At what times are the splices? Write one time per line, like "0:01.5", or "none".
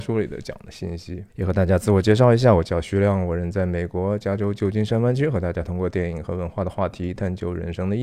0:01.3